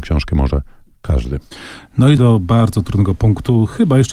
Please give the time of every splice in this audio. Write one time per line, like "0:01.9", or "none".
0:02.2